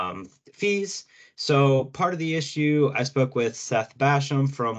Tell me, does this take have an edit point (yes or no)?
no